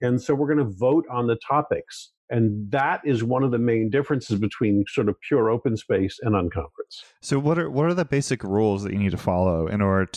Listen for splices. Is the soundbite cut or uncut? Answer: cut